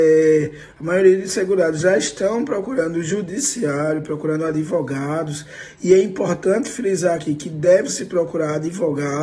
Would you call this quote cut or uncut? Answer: uncut